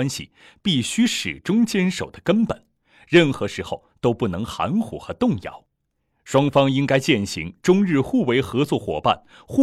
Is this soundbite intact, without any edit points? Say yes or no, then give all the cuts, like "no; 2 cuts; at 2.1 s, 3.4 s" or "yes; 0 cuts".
yes; 0 cuts